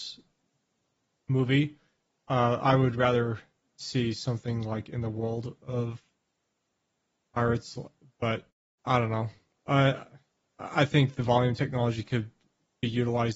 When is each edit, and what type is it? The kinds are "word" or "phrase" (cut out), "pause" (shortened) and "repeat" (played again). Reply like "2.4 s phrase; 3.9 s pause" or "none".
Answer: none